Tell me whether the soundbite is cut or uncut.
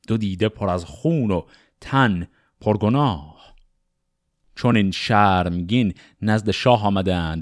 uncut